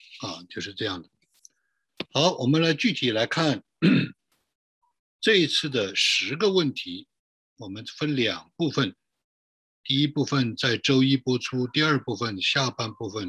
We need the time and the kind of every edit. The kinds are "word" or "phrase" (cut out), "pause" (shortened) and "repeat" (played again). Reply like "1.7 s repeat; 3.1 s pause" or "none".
none